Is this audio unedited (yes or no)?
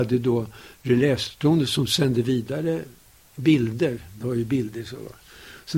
yes